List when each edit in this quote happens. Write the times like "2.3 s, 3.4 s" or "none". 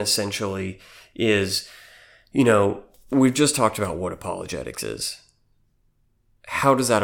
none